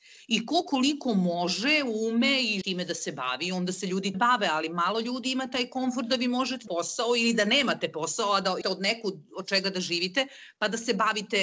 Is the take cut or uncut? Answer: cut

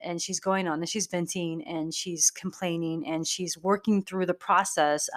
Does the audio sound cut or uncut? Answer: uncut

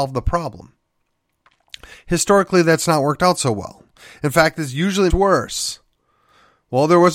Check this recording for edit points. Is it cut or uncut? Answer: cut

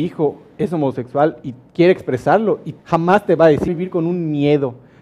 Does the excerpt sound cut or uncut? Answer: cut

